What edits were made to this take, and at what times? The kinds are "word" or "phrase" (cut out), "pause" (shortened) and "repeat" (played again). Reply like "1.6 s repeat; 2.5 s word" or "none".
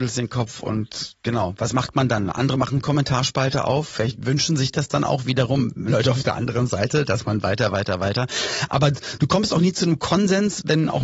2.8 s phrase; 9.2 s word